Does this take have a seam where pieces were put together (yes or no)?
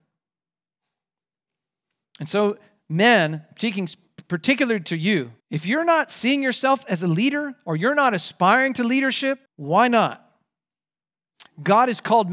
yes